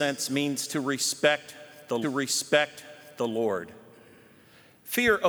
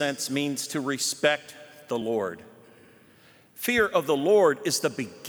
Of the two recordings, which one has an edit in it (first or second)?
first